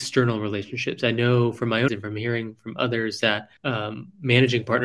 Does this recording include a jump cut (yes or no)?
yes